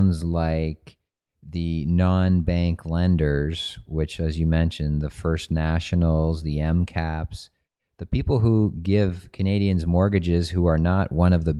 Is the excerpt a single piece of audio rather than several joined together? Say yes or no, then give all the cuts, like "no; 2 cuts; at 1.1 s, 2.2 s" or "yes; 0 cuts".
yes; 0 cuts